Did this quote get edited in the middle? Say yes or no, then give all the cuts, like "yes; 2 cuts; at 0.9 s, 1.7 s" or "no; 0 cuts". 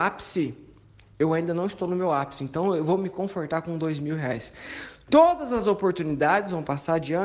no; 0 cuts